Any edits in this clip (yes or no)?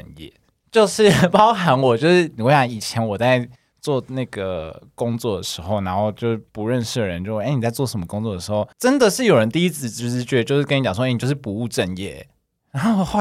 yes